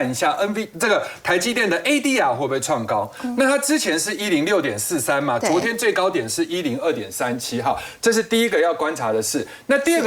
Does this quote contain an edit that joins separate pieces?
no; 0 cuts

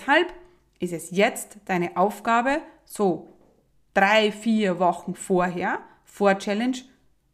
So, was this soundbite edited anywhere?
no; 0 cuts

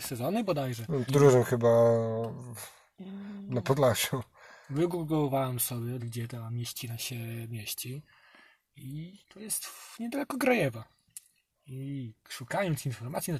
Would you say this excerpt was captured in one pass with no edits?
no; 3 cuts; at 1.1 s, 6.0 s, 9.2 s

